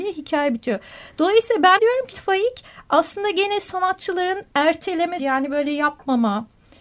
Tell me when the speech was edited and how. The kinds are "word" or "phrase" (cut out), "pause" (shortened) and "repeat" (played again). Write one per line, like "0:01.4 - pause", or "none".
0:01.8 - word
0:02.1 - word
0:05.2 - word